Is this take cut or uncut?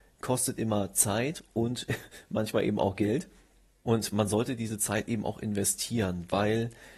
uncut